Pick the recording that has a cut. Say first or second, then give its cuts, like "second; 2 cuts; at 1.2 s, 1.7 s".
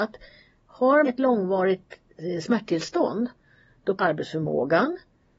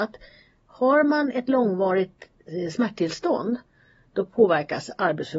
first; 2 cuts; at 1.0 s, 4.0 s